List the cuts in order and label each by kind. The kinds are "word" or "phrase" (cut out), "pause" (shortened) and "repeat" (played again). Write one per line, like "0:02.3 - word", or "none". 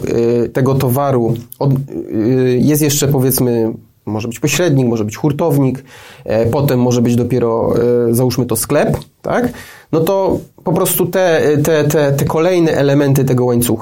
0:10.5 - pause